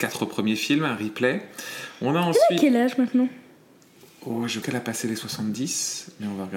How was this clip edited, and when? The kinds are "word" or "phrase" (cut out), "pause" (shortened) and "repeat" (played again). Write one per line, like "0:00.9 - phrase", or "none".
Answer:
0:04.6 - word